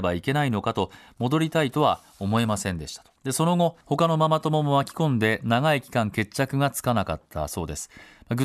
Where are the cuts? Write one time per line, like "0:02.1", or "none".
0:03.2
0:03.8